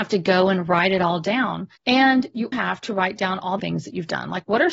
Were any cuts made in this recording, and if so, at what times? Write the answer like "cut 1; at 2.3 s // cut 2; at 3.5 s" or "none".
cut 1; at 1.8 s // cut 2; at 2.5 s // cut 3; at 3.6 s